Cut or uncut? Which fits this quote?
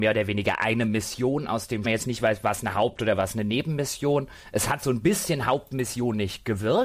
cut